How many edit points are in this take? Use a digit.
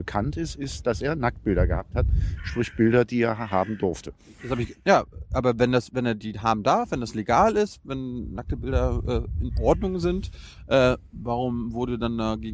1